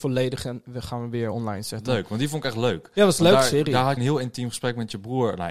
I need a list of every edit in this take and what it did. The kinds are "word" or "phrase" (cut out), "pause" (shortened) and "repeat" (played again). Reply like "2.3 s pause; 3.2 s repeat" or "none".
4.0 s word